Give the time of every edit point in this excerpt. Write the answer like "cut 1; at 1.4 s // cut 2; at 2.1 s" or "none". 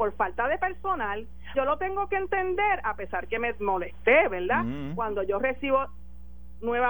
cut 1; at 1.5 s